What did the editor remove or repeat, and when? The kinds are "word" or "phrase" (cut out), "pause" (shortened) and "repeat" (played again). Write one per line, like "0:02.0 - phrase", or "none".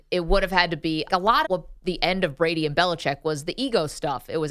0:01.1 - word
0:01.4 - word